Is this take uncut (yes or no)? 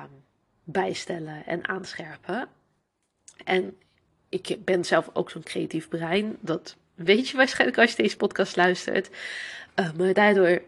yes